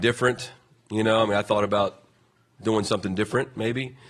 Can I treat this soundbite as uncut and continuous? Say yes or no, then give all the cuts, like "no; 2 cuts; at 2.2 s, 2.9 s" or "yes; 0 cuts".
yes; 0 cuts